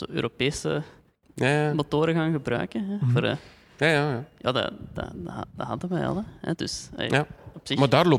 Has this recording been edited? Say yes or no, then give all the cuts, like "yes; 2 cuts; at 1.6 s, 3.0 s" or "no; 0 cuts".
no; 0 cuts